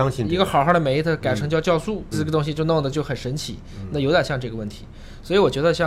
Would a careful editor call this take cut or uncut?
cut